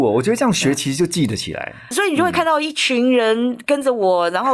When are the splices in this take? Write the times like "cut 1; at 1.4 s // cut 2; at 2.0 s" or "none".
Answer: cut 1; at 1.9 s